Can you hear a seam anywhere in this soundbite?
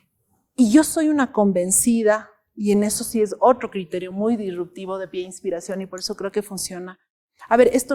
no; 0 cuts

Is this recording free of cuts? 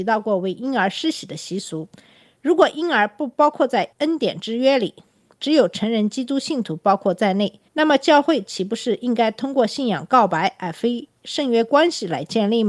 no; 2 cuts; at 3.9 s, 7.7 s

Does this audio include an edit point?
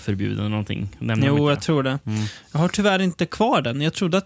no; 0 cuts

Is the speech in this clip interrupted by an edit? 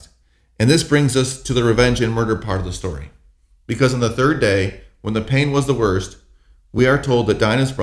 no; 0 cuts

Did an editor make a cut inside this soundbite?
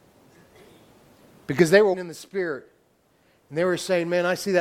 yes; 1 cut; at 1.9 s

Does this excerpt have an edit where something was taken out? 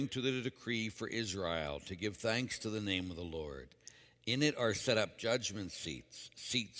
no; 0 cuts

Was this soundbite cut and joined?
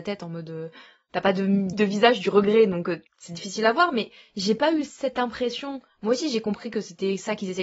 yes; 2 cuts; at 1.7 s, 3.1 s

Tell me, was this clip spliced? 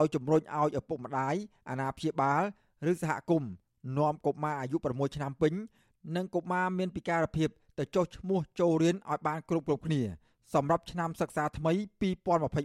no; 0 cuts

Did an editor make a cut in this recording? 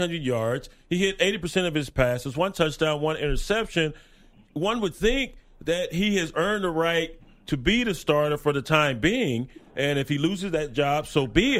no; 0 cuts

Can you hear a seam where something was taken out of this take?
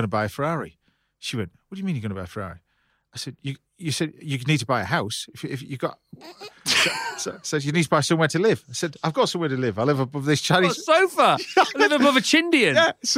yes; 1 cut; at 3.7 s

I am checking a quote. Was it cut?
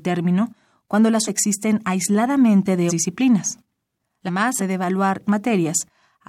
yes; 5 cuts; at 1.3 s, 2.9 s, 4.3 s, 4.6 s, 5.3 s

